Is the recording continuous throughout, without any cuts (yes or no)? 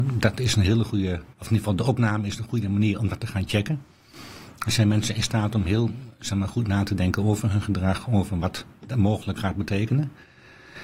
no